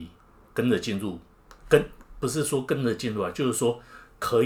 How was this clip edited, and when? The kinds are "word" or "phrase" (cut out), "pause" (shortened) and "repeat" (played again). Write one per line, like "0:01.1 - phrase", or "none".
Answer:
0:01.6 - pause